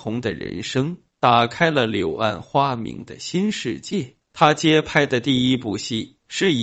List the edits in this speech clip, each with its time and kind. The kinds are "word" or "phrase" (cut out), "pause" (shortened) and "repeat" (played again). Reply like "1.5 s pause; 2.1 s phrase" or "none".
4.2 s pause